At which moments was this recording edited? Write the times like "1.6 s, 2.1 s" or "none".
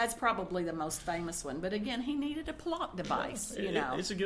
none